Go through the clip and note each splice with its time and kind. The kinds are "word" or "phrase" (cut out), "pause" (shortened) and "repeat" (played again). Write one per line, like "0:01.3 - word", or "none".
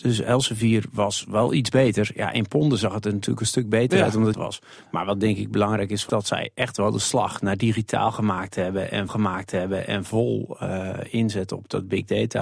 0:04.3 - phrase
0:06.1 - phrase
0:09.1 - repeat